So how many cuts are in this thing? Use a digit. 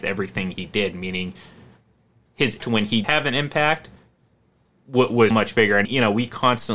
4